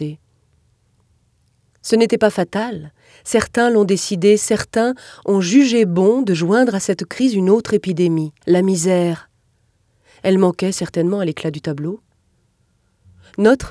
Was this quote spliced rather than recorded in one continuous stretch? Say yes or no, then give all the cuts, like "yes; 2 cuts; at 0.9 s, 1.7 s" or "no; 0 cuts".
yes; 1 cut; at 8.4 s